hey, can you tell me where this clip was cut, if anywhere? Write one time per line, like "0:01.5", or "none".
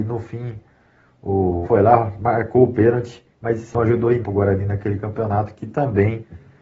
0:01.6
0:03.3
0:03.7
0:04.2

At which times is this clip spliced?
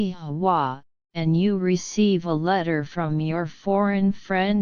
0:01.0

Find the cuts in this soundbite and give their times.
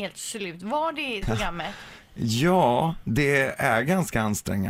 0:01.2

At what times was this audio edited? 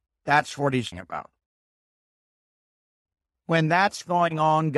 0:00.9

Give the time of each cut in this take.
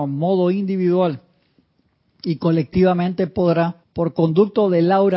0:03.8

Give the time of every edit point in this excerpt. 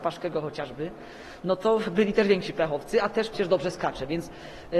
0:03.3

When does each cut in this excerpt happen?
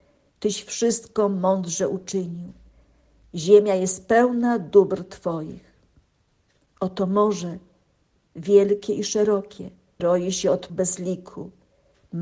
0:10.0
0:10.7

